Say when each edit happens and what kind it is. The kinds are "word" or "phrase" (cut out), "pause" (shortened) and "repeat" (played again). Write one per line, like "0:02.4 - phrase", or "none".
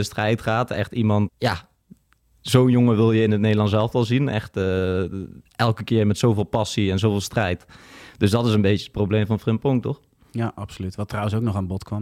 0:01.3 - word
0:05.5 - pause